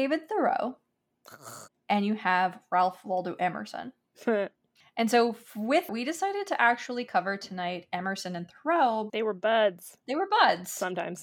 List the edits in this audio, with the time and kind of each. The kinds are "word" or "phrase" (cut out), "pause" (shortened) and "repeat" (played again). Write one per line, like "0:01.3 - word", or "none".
0:01.7 - pause
0:04.8 - pause
0:05.9 - word
0:09.1 - word